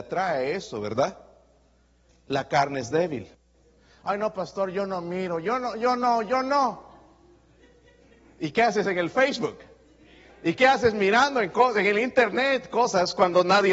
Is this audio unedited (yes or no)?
yes